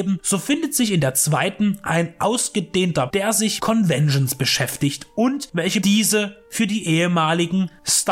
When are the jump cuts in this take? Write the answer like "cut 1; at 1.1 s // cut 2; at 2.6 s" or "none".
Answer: cut 1; at 3.1 s // cut 2; at 3.6 s // cut 3; at 5.8 s